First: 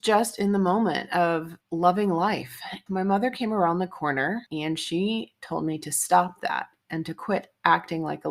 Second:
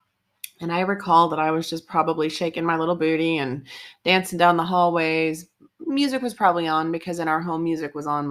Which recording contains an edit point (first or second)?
first